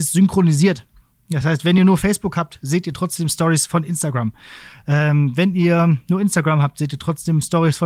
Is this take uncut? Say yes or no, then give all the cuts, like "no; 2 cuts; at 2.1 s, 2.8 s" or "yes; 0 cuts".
yes; 0 cuts